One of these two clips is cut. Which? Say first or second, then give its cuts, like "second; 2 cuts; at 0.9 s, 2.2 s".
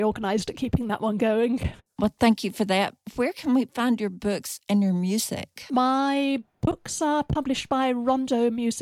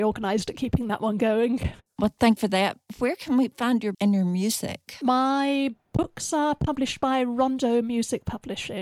second; 2 cuts; at 2.4 s, 3.9 s